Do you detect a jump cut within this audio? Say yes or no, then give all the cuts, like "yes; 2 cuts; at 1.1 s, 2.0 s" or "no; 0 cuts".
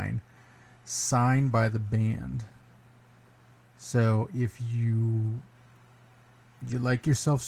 no; 0 cuts